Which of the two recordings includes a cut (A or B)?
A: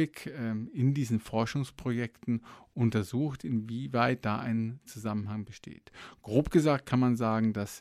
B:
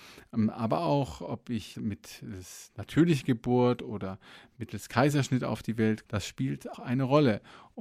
B